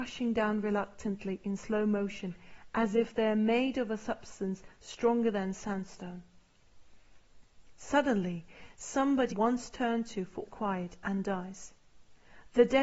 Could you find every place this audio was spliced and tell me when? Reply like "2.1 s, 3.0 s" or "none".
9.3 s, 10.4 s